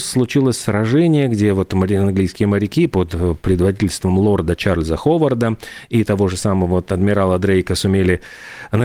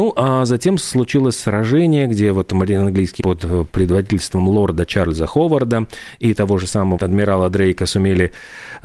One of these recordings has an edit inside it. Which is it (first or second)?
second